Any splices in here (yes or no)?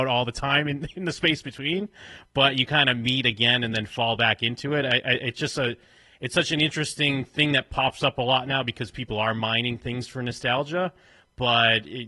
no